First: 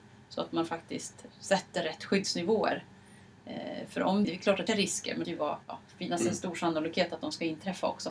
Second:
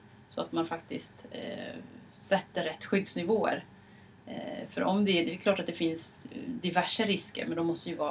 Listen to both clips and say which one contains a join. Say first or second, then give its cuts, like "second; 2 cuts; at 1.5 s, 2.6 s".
first; 5 cuts; at 1.3 s, 4.2 s, 4.7 s, 5.2 s, 5.6 s